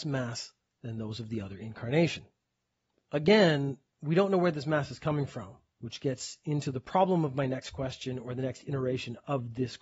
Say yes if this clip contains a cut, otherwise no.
no